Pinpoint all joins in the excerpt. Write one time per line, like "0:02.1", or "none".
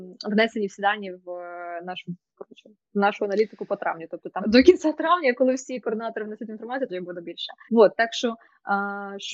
0:04.4
0:06.9
0:07.7